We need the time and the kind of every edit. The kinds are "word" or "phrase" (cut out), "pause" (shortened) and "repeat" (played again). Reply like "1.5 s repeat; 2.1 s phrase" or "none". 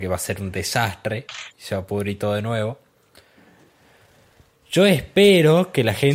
none